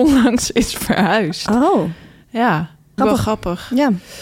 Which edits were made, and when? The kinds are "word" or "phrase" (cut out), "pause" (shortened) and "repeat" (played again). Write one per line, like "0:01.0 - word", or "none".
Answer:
0:03.0 - phrase